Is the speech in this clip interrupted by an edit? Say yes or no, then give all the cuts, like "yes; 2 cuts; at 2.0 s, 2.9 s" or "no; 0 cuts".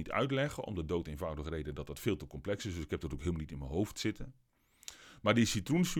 no; 0 cuts